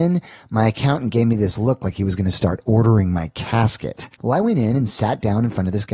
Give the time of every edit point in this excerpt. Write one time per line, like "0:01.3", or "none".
0:04.1